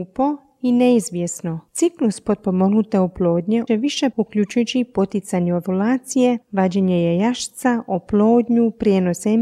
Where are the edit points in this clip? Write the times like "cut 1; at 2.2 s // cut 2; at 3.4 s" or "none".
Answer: cut 1; at 1.7 s // cut 2; at 3.7 s // cut 3; at 4.1 s